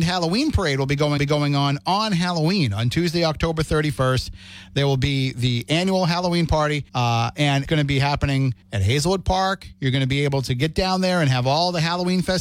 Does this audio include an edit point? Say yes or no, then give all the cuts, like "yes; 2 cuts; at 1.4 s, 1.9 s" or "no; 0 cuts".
yes; 4 cuts; at 1.2 s, 6.9 s, 7.7 s, 8.6 s